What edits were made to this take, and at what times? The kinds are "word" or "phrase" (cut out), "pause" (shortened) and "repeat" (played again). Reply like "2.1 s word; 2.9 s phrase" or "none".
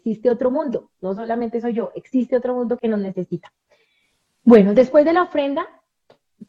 2.8 s word